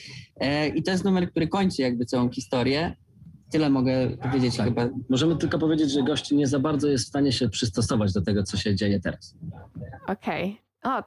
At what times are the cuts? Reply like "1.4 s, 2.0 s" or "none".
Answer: none